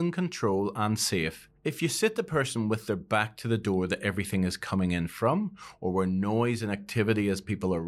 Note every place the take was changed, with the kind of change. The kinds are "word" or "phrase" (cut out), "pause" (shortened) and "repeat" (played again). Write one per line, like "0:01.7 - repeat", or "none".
0:01.6 - pause